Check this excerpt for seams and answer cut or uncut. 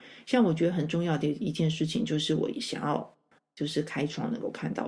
uncut